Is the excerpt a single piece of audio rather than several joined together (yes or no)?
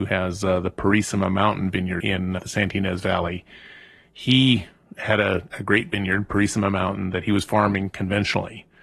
no